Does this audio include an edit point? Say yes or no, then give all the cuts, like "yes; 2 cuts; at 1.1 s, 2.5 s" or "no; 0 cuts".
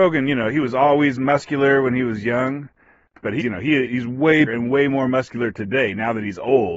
yes; 3 cuts; at 3.4 s, 3.8 s, 4.5 s